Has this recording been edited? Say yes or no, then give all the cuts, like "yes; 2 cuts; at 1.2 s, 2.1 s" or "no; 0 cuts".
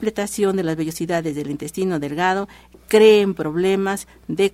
no; 0 cuts